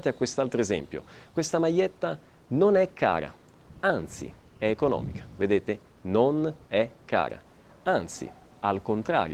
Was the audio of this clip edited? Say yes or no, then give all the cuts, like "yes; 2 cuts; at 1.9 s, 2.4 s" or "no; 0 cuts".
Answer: no; 0 cuts